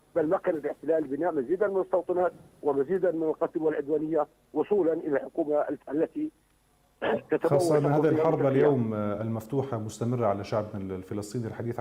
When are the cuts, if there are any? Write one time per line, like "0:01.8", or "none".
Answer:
0:05.8